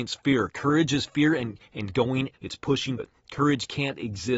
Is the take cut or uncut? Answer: cut